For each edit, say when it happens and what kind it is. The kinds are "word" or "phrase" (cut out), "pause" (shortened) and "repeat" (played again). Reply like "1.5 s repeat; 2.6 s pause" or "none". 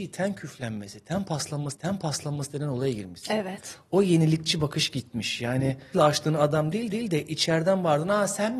1.7 s repeat; 5.9 s phrase; 6.9 s repeat